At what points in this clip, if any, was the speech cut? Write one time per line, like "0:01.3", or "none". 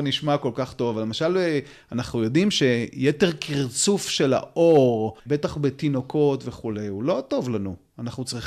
0:05.2